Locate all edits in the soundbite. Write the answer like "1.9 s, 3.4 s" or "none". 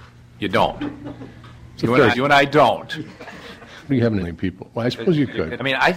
2.1 s, 3.9 s, 4.2 s